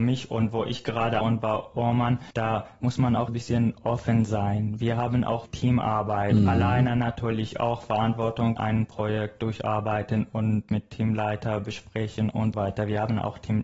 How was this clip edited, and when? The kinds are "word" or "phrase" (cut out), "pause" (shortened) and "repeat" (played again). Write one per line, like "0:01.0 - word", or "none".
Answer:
0:01.2 - word
0:02.3 - pause
0:03.3 - word
0:05.5 - word
0:08.6 - word
0:12.5 - word